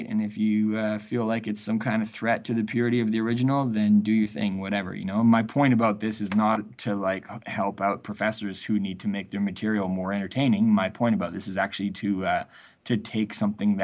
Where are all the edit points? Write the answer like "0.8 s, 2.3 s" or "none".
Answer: none